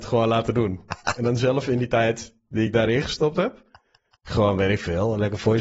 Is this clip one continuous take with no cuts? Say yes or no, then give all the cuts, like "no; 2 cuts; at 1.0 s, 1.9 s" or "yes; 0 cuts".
yes; 0 cuts